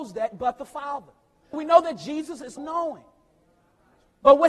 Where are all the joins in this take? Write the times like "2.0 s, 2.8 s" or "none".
1.5 s, 2.6 s